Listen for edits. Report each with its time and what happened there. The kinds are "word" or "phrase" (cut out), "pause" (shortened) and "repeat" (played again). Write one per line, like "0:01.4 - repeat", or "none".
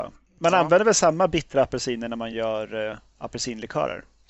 none